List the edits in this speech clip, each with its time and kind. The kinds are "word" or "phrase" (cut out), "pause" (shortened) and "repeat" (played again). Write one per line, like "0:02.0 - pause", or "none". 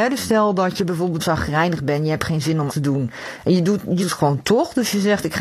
0:01.2 - word
0:02.7 - word
0:04.0 - word